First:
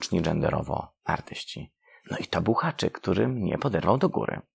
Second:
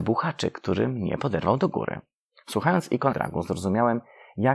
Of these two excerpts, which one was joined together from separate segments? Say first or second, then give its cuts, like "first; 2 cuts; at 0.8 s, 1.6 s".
second; 1 cut; at 3.1 s